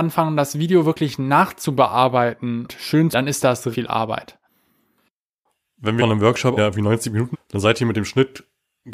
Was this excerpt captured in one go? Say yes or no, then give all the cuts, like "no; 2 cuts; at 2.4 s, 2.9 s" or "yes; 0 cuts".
no; 6 cuts; at 2.7 s, 3.1 s, 3.7 s, 6.0 s, 6.6 s, 7.3 s